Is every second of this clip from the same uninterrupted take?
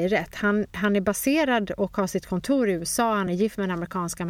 yes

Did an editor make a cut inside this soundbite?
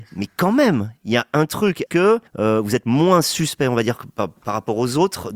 yes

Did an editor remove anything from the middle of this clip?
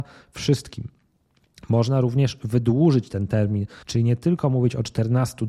yes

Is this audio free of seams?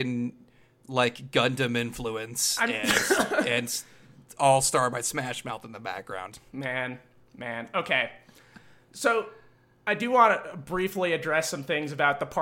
yes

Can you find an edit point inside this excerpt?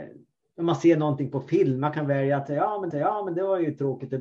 yes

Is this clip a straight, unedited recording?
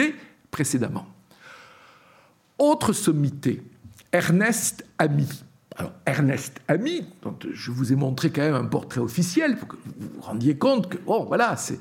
yes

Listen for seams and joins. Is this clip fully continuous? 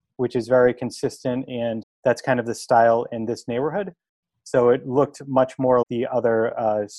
no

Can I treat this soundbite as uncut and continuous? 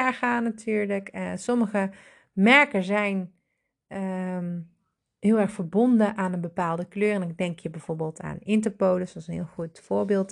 yes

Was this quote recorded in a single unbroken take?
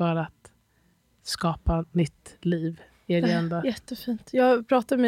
yes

